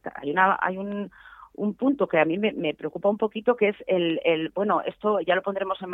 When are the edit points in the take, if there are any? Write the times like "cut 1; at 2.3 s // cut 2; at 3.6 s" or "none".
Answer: none